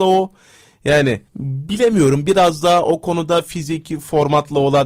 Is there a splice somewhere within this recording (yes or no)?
yes